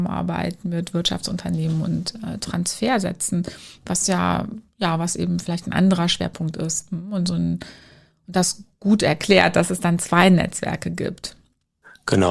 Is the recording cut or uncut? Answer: uncut